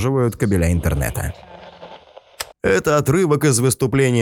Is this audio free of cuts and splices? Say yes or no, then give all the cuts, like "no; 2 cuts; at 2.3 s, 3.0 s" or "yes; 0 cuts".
no; 1 cut; at 2.5 s